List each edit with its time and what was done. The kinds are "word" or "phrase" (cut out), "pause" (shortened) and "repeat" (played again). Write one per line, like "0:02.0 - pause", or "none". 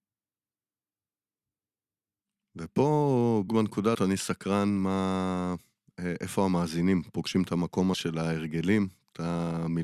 0:03.5 - word
0:03.9 - word
0:07.9 - word

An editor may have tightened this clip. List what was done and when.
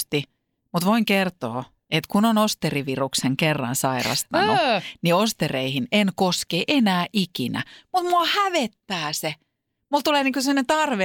none

